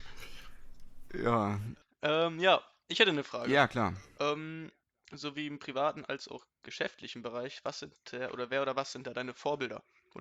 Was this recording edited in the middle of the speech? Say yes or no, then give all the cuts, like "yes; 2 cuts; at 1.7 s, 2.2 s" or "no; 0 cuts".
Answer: no; 0 cuts